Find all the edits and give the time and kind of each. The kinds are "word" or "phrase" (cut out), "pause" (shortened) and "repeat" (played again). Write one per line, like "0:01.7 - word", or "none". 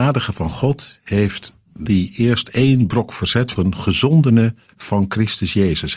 0:01.9 - word
0:03.6 - phrase